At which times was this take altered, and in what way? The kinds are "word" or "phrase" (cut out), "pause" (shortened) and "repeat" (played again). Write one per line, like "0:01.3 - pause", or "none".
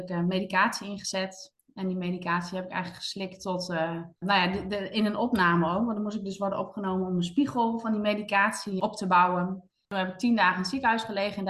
0:04.2 - pause
0:08.8 - word